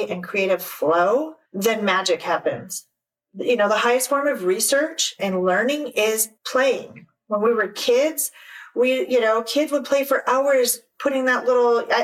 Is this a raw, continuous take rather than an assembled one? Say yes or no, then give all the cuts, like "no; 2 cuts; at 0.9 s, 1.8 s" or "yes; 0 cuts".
no; 2 cuts; at 1.4 s, 6.4 s